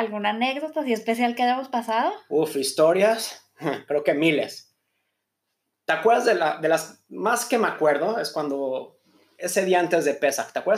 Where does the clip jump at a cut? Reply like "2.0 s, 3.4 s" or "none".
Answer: none

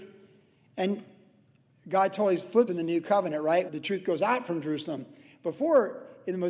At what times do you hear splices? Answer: 2.7 s, 3.7 s

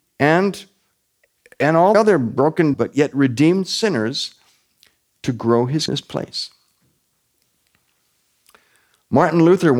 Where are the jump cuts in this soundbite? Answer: 1.9 s, 2.7 s, 5.9 s

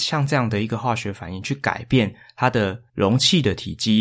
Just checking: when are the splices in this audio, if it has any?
2.9 s

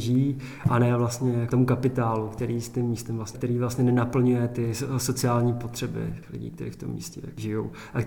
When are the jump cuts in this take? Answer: 3.3 s

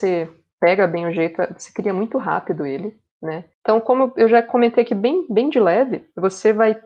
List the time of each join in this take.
3.5 s

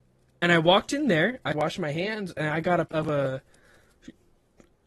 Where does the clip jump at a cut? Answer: 1.5 s, 2.9 s

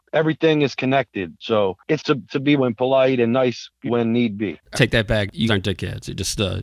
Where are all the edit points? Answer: 2.0 s, 2.6 s, 3.9 s, 4.7 s, 5.5 s

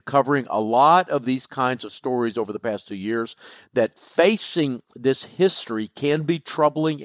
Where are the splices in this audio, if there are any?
none

